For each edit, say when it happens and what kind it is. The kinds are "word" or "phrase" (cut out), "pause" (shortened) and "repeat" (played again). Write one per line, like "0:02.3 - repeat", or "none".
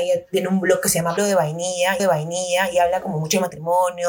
0:01.2 - word
0:02.0 - repeat